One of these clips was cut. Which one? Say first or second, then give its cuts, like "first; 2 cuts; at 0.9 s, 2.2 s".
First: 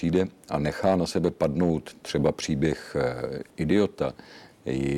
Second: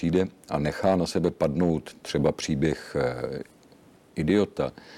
first; 1 cut; at 3.5 s